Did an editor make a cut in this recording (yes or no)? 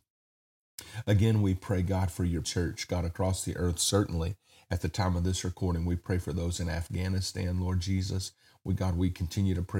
yes